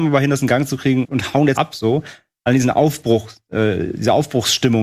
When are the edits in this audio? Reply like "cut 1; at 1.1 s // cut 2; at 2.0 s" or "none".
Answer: cut 1; at 1.0 s // cut 2; at 1.6 s